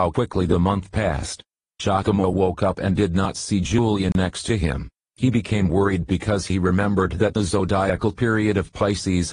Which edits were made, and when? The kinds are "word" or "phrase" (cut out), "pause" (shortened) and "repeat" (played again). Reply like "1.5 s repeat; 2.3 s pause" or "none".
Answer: 1.6 s pause; 4.9 s pause